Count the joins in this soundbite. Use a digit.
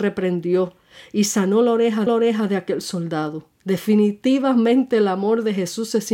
2